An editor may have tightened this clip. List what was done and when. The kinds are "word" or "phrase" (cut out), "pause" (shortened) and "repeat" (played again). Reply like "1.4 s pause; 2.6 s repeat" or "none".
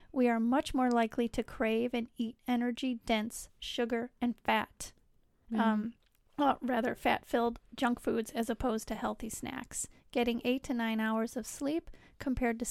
none